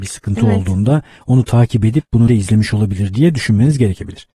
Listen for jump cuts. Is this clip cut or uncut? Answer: cut